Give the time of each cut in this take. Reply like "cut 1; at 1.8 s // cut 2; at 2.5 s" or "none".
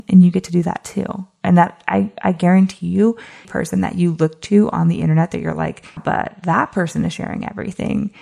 cut 1; at 3.4 s // cut 2; at 6.0 s